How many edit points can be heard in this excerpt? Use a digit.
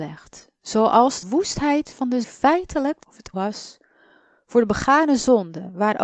4